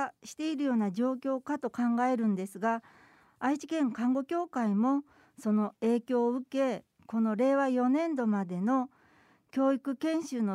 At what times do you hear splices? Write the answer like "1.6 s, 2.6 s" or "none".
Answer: none